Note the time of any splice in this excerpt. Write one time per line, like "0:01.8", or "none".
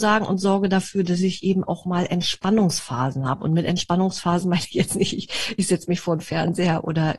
none